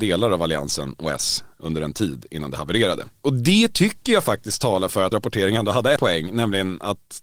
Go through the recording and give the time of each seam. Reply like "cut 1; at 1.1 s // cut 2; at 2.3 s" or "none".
cut 1; at 5.1 s // cut 2; at 6.0 s